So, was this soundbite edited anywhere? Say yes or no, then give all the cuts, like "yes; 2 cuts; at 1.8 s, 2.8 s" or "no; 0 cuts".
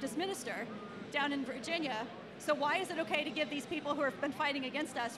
no; 0 cuts